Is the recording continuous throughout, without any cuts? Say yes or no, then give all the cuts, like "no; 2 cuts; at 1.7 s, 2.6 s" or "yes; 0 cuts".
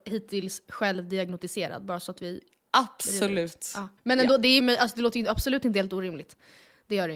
no; 2 cuts; at 4.0 s, 4.6 s